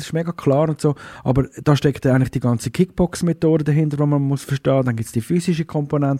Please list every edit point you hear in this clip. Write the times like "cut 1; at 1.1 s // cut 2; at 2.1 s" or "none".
none

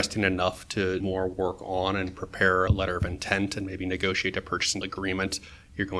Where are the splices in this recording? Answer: cut 1; at 1.0 s // cut 2; at 2.7 s // cut 3; at 4.8 s

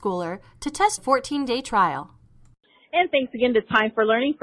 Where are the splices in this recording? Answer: cut 1; at 1.0 s

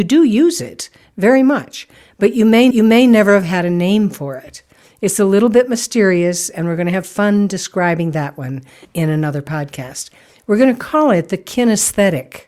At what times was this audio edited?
cut 1; at 2.7 s // cut 2; at 8.8 s

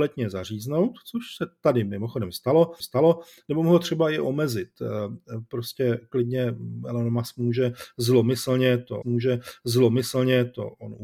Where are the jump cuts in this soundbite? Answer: cut 1; at 2.8 s // cut 2; at 9.0 s

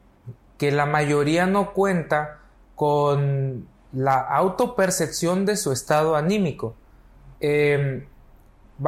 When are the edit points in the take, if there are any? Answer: cut 1; at 2.5 s // cut 2; at 7.3 s

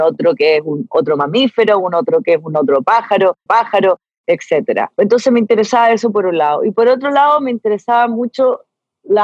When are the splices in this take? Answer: cut 1; at 3.5 s

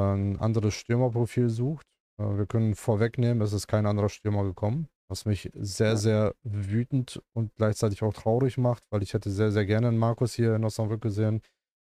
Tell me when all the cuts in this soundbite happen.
cut 1; at 2.0 s // cut 2; at 5.0 s

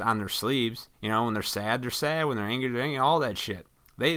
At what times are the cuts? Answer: cut 1; at 0.9 s

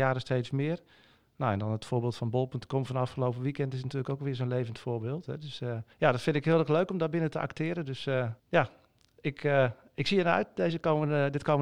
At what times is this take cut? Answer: cut 1; at 5.9 s // cut 2; at 8.4 s

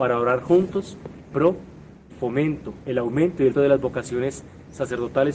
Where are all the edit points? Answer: cut 1; at 1.3 s // cut 2; at 2.1 s // cut 3; at 3.5 s

